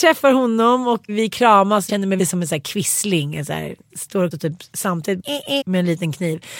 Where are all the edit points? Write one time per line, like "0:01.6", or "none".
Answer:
0:01.1
0:01.9
0:02.2
0:03.9
0:04.3
0:05.2
0:05.6